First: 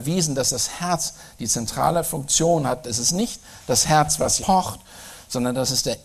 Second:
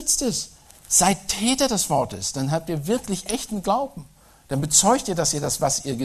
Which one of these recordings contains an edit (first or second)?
first